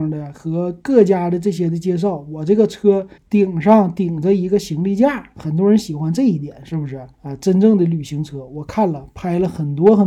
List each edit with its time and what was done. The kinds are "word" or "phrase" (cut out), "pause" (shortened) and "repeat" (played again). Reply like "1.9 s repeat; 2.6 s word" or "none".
3.2 s pause; 7.1 s pause